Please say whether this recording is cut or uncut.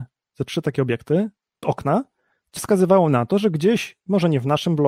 cut